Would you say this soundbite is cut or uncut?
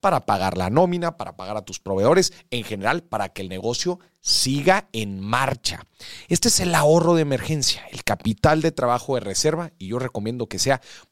uncut